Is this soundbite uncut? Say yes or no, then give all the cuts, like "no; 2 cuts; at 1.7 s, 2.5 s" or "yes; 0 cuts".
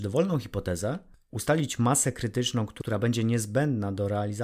yes; 0 cuts